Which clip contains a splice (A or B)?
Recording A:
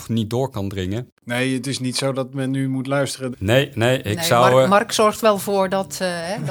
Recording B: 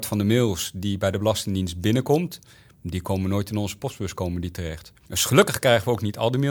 A